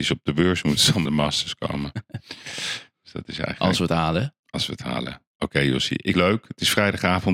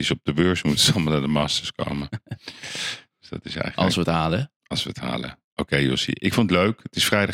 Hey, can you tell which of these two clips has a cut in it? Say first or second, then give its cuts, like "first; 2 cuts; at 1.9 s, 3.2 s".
first; 2 cuts; at 1.1 s, 6.1 s